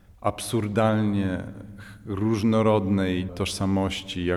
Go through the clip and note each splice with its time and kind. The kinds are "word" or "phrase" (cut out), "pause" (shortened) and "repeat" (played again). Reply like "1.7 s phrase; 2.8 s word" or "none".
3.3 s word